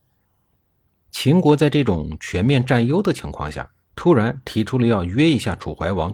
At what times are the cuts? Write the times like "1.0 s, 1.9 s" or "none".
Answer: 3.8 s